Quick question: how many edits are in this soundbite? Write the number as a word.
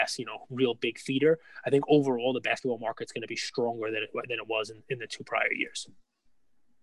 zero